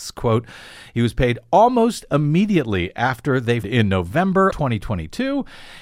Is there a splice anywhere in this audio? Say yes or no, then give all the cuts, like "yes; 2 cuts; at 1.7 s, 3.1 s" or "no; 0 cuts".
yes; 2 cuts; at 3.6 s, 4.5 s